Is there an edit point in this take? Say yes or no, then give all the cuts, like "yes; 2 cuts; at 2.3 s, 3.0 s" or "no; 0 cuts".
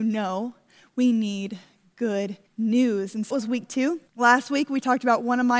yes; 3 cuts; at 2.5 s, 3.3 s, 4.1 s